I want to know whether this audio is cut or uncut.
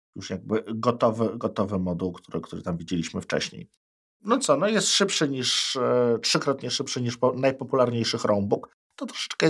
uncut